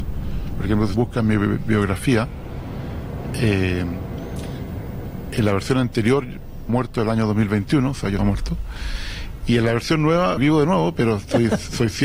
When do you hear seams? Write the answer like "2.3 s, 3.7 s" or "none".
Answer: 0.9 s, 6.7 s, 8.2 s, 10.4 s